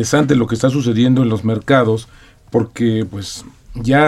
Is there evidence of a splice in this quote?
no; 0 cuts

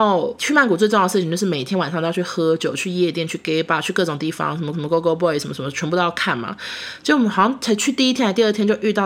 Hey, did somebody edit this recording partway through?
yes; 1 cut; at 4.7 s

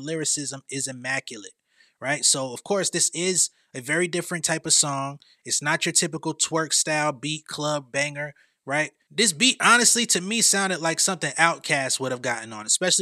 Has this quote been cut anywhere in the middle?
no; 0 cuts

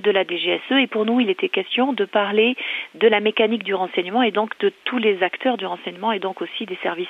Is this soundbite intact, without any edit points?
yes; 0 cuts

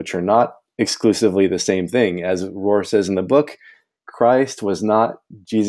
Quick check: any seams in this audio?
no; 0 cuts

